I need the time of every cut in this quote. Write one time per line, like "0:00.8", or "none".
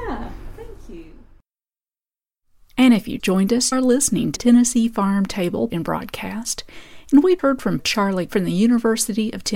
0:03.2
0:03.7
0:04.4
0:05.7
0:07.4
0:07.8
0:08.3